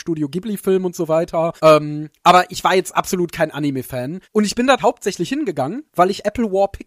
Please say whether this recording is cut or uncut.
cut